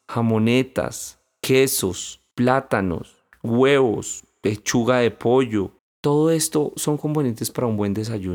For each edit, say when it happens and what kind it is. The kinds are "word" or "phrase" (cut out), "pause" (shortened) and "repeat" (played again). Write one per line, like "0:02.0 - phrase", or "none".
0:02.3 - pause
0:05.8 - pause